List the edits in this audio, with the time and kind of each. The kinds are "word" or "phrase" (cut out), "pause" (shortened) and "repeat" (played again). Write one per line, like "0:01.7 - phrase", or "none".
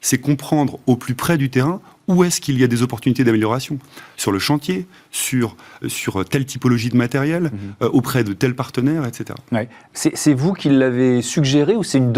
0:05.8 - word